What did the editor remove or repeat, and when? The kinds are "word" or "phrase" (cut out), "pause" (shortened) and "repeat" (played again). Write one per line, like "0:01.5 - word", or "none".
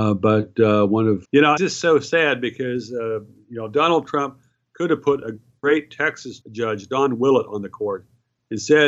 0:01.2 - word
0:01.6 - word
0:06.4 - word

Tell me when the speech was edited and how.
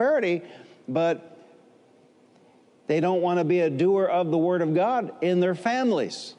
none

